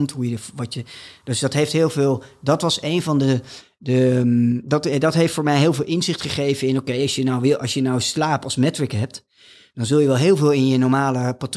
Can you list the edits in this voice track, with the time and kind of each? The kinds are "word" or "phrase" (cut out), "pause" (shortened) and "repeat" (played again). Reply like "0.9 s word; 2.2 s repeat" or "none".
none